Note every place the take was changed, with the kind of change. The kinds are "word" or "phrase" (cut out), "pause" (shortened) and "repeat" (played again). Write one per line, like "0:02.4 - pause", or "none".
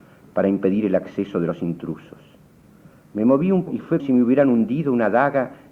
0:03.7 - word
0:04.0 - word